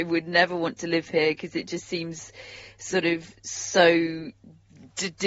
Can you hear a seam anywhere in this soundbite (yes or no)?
no